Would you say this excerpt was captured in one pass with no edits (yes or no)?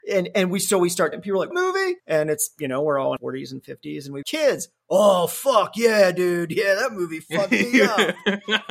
no